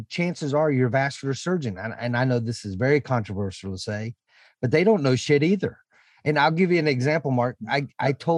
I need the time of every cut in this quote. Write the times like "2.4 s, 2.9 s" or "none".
none